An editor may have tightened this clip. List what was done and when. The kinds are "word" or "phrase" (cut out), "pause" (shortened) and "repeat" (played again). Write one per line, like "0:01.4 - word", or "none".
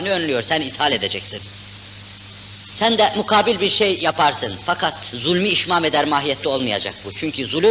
0:05.1 - phrase